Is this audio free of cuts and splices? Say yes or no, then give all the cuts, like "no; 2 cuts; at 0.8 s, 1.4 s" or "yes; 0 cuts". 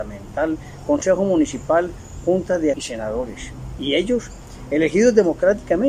no; 1 cut; at 2.7 s